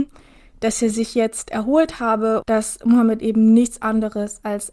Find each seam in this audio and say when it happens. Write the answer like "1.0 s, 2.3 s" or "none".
2.4 s